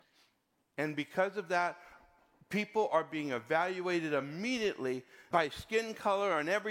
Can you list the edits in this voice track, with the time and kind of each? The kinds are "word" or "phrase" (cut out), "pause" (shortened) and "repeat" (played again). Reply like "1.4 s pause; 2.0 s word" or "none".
5.3 s word